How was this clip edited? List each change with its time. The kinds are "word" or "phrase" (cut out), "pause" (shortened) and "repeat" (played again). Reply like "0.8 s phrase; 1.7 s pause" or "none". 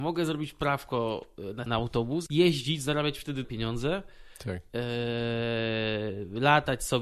1.7 s word; 2.3 s word; 3.4 s word